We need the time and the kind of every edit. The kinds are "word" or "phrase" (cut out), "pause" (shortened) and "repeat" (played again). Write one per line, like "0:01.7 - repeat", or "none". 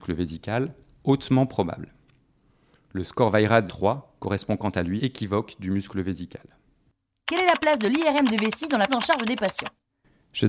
0:03.7 - phrase
0:05.0 - phrase
0:08.9 - word